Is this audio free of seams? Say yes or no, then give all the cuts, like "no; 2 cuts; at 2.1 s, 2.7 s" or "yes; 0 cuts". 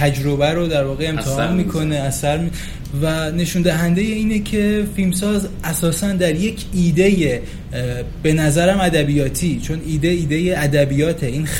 yes; 0 cuts